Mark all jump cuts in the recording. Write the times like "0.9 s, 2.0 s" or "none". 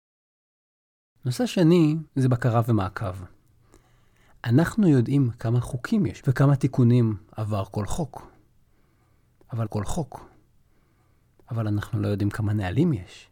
2.1 s, 6.2 s, 9.7 s